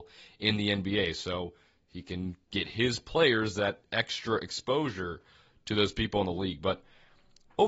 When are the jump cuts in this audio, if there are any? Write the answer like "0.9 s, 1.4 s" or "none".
none